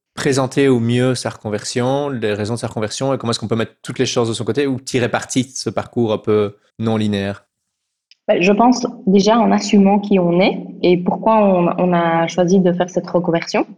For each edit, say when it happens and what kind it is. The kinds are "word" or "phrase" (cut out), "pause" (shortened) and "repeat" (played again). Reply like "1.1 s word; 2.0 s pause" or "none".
6.7 s pause

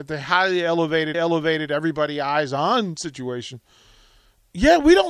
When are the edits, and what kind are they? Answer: 1.1 s repeat

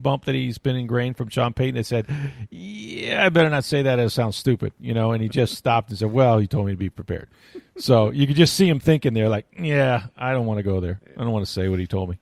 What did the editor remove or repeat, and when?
none

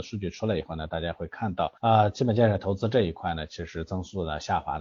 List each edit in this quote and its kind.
1.8 s pause

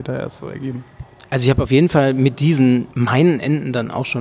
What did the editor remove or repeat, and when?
2.9 s pause

